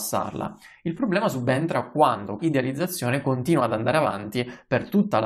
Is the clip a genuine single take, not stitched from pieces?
no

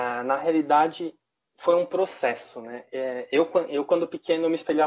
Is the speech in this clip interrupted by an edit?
no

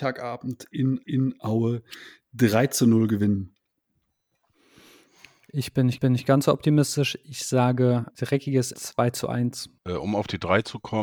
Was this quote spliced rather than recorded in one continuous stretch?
yes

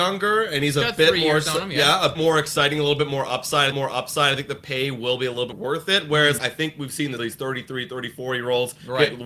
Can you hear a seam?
yes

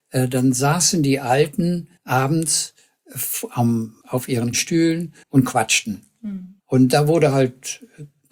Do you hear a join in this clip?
yes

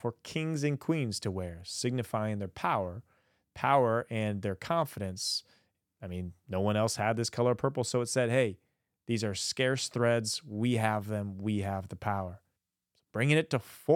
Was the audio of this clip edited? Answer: no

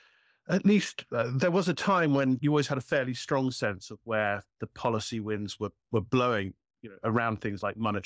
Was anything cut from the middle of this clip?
no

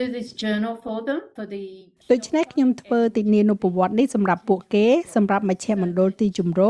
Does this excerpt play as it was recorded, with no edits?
yes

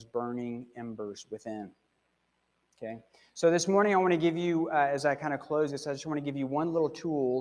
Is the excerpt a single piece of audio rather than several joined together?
yes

